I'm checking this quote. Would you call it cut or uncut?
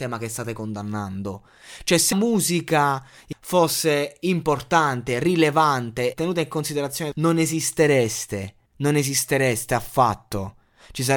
cut